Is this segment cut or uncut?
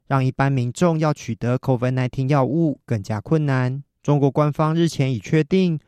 cut